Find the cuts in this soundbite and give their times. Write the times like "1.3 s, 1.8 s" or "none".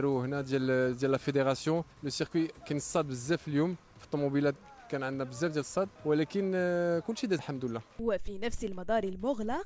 1.9 s, 6.0 s, 7.4 s